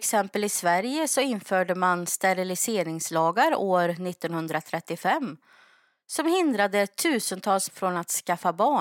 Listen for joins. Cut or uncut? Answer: cut